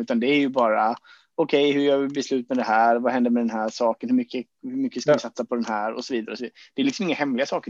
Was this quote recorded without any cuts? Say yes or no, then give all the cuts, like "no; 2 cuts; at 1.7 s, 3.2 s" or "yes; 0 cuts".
yes; 0 cuts